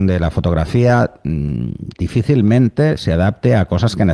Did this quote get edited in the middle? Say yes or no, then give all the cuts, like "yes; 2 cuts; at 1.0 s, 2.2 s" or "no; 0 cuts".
no; 0 cuts